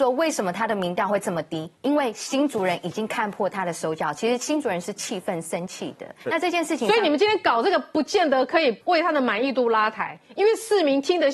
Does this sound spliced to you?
yes; 2 cuts; at 6.2 s, 8.8 s

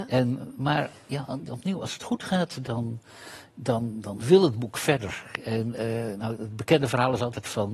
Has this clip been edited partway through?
no; 0 cuts

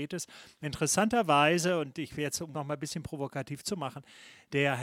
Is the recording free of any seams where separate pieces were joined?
no; 1 cut; at 2.5 s

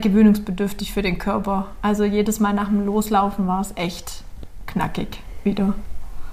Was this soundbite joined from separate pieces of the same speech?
no; 0 cuts

